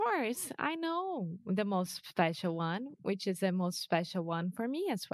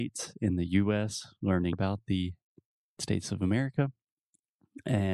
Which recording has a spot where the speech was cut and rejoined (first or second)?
second